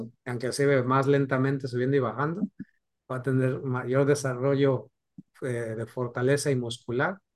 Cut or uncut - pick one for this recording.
uncut